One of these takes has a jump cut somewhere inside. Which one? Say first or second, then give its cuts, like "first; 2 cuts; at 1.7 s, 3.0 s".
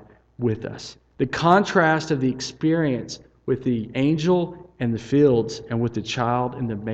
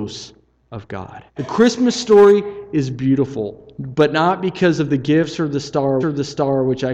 second; 2 cuts; at 1.3 s, 6.0 s